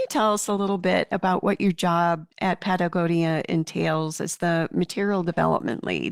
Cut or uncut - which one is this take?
cut